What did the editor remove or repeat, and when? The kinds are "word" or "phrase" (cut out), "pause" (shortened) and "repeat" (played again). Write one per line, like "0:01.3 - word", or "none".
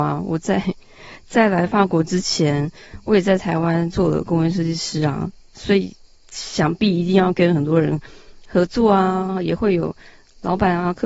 none